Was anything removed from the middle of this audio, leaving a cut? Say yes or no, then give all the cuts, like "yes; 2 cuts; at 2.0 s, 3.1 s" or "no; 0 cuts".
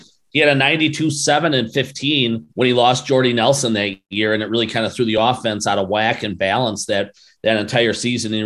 yes; 1 cut; at 2.5 s